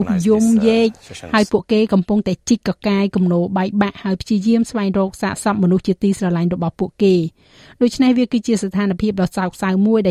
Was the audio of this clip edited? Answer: no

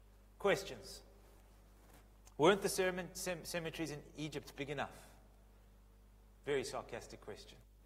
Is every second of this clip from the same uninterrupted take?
yes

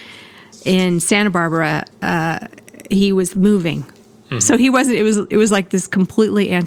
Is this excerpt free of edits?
yes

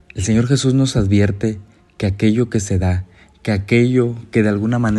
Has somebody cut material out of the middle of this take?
no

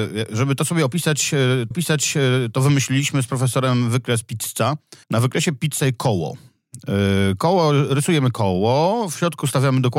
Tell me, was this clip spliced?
yes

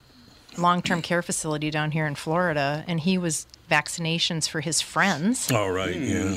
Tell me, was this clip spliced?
yes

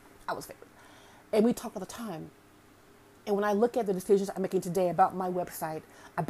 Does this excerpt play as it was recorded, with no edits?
yes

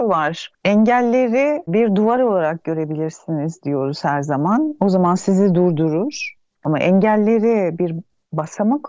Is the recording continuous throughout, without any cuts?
yes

